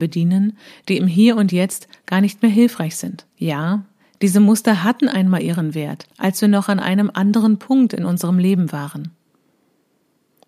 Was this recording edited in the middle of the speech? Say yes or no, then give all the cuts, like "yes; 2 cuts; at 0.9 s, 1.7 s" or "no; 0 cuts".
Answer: yes; 2 cuts; at 3.3 s, 6.1 s